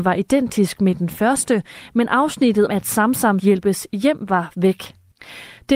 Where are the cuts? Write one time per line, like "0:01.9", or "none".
0:02.7
0:03.4